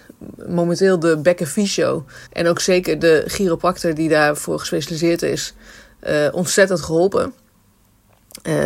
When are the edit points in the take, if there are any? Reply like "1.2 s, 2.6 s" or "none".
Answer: 2.3 s